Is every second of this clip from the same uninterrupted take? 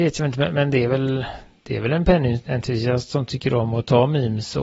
yes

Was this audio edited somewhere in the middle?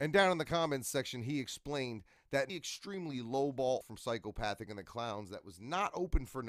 yes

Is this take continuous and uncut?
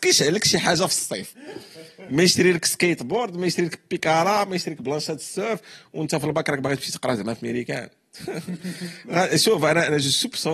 yes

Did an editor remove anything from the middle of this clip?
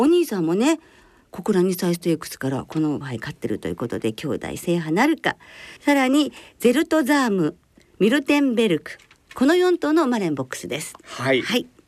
yes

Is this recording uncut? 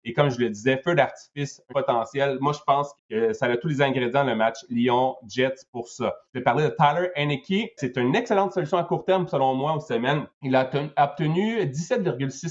no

